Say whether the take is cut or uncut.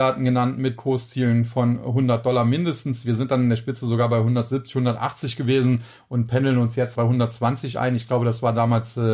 cut